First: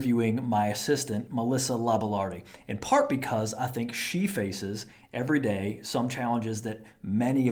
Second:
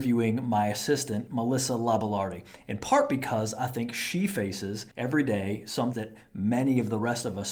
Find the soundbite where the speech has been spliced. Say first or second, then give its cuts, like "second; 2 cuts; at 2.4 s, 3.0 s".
second; 2 cuts; at 4.9 s, 5.9 s